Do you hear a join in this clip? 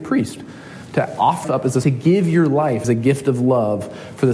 yes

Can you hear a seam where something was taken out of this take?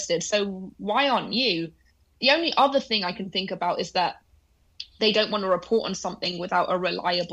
no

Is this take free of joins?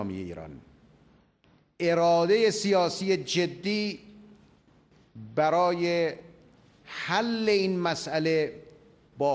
yes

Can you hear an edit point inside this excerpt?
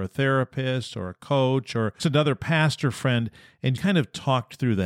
yes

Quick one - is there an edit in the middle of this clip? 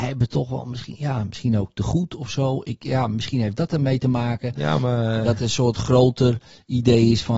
no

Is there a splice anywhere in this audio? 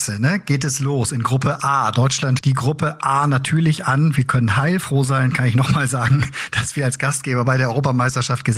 yes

